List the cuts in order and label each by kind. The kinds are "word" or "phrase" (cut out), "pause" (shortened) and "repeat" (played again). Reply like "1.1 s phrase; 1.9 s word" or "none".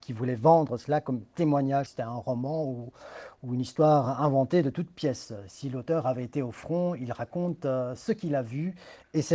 1.9 s phrase